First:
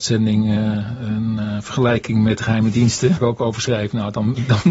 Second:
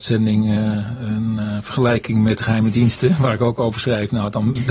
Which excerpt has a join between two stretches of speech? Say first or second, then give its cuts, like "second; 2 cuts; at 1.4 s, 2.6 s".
first; 1 cut; at 3.2 s